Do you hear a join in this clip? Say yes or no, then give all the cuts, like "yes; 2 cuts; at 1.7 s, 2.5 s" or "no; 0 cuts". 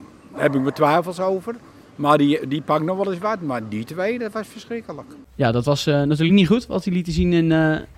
no; 0 cuts